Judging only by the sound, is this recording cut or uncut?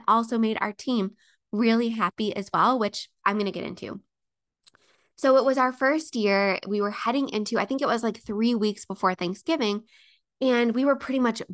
uncut